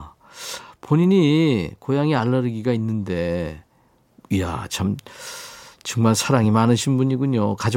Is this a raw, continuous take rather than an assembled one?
yes; 0 cuts

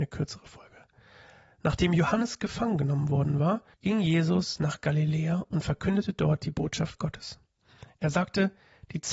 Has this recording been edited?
yes; 1 cut; at 3.7 s

